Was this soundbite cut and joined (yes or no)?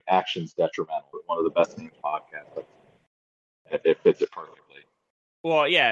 yes